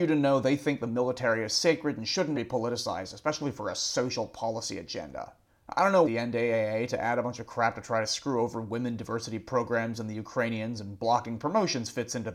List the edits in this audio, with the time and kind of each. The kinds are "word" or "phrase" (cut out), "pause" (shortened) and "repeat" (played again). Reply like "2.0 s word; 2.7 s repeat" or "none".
2.3 s word; 5.5 s pause; 6.0 s phrase